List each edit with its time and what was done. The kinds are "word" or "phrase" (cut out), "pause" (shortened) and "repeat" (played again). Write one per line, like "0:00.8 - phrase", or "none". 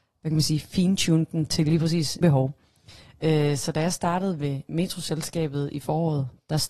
0:02.2 - word